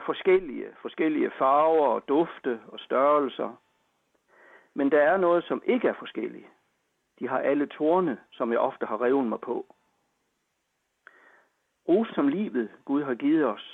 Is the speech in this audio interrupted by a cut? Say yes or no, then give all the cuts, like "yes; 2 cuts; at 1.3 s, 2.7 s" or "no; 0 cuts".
yes; 2 cuts; at 8.3 s, 12.1 s